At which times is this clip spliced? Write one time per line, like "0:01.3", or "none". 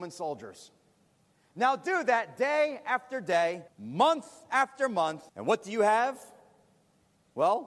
0:03.7
0:05.3